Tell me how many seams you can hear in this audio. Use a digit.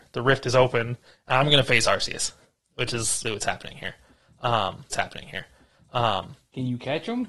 3